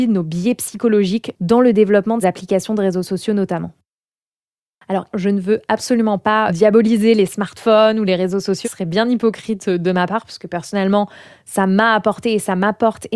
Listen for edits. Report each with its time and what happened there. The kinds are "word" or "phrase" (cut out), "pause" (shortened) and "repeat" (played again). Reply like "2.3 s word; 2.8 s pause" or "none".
2.2 s word; 5.1 s word; 6.5 s word; 8.6 s word